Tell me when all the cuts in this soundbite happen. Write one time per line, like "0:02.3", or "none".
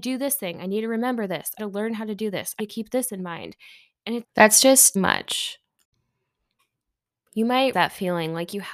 0:01.6
0:02.6
0:04.2
0:05.0
0:07.7